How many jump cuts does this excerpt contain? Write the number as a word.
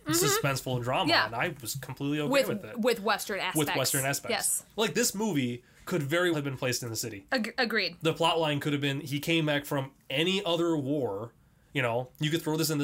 two